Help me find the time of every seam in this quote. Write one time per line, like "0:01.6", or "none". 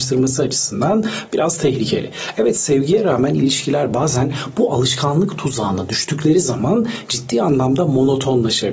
none